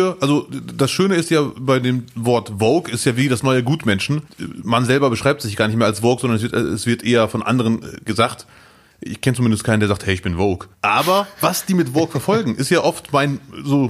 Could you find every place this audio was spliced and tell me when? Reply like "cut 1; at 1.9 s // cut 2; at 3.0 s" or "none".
cut 1; at 4.3 s // cut 2; at 10.7 s